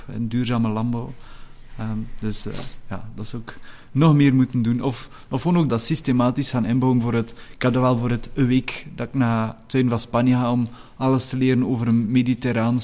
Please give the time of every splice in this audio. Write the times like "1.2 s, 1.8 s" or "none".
5.7 s